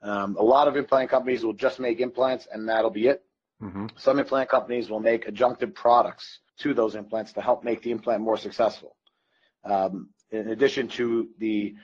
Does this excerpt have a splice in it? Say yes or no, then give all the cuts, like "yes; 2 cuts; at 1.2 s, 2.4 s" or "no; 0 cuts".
yes; 1 cut; at 6.5 s